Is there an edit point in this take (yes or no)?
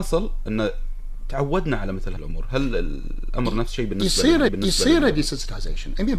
yes